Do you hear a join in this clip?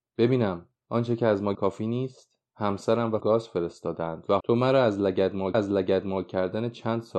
yes; 4 cuts; at 1.5 s, 3.2 s, 4.4 s, 5.5 s

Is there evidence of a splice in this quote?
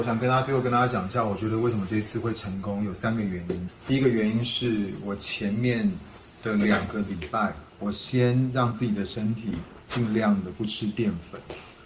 yes; 1 cut; at 7.7 s

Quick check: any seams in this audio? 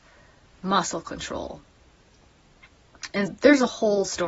yes; 1 cut; at 3.3 s

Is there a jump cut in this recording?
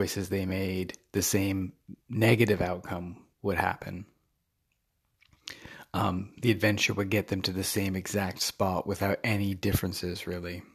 yes; 2 cuts; at 2.0 s, 3.3 s

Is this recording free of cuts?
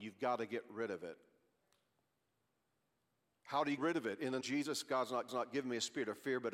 no; 3 cuts; at 3.8 s, 4.4 s, 5.3 s

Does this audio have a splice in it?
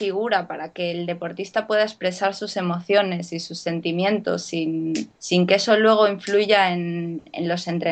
yes; 1 cut; at 5.2 s

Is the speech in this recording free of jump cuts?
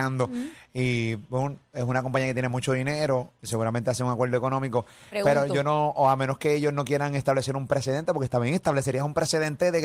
yes; 0 cuts

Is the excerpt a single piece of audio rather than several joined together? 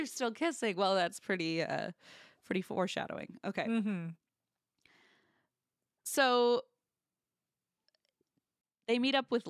yes; 0 cuts

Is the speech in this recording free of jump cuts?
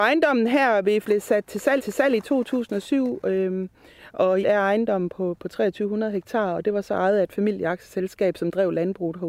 no; 3 cuts; at 1.0 s, 1.8 s, 4.4 s

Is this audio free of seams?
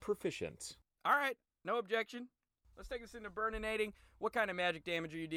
yes; 0 cuts

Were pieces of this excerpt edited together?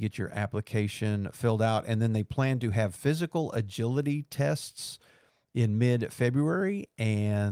no; 0 cuts

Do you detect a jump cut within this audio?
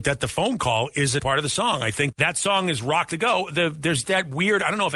yes; 4 cuts; at 1.2 s, 2.1 s, 3.1 s, 4.0 s

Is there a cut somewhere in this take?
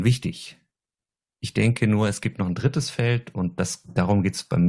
no; 0 cuts

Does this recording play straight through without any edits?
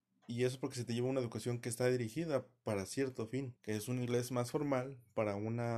no; 1 cut; at 3.6 s

